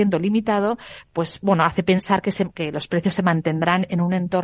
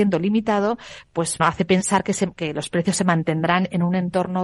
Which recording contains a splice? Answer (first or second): second